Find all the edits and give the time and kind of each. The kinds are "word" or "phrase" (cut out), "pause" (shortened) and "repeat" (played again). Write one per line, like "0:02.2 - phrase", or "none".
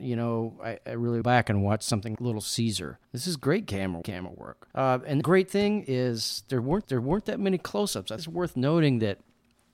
0:01.2 - phrase
0:02.2 - word
0:03.0 - pause
0:04.0 - phrase
0:04.7 - pause
0:05.2 - word
0:06.8 - repeat
0:08.2 - word